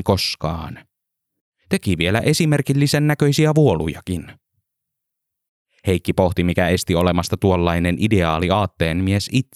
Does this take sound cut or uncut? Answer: uncut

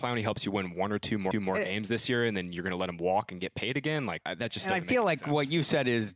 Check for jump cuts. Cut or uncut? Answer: cut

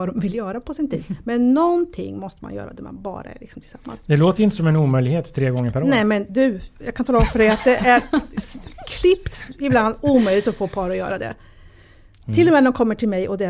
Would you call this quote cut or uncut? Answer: uncut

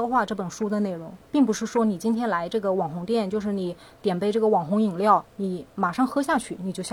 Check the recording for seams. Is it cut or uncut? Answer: cut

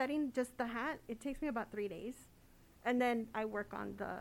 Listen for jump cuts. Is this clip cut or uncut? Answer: uncut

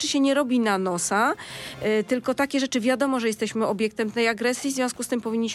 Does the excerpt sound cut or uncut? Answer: uncut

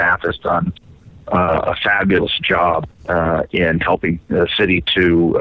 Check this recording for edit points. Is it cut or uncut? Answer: cut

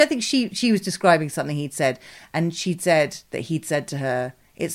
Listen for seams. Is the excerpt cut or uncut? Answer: uncut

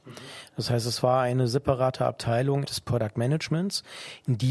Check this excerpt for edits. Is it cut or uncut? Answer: cut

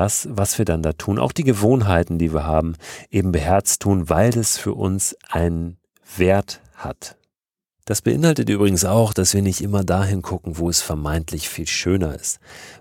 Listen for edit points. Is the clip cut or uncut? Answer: uncut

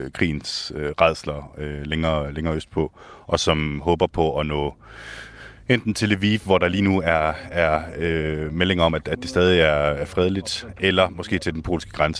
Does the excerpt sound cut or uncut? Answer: uncut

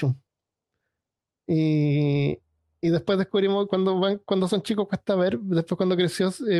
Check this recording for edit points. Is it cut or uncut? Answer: uncut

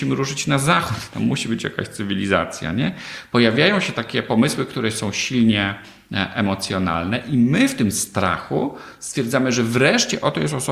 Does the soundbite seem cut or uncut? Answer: uncut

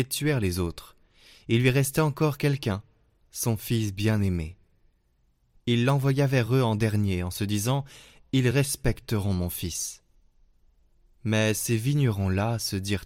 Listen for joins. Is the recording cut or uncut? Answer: uncut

